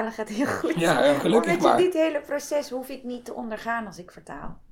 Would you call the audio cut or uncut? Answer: uncut